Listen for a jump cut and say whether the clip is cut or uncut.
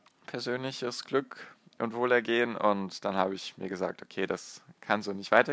uncut